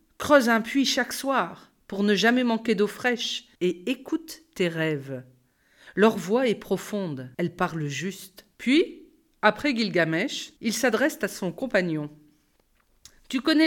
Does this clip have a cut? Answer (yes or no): yes